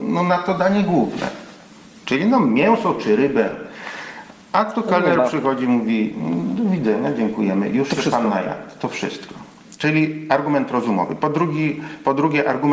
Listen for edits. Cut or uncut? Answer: uncut